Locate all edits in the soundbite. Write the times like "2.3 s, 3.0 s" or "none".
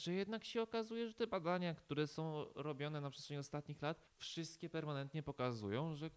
4.1 s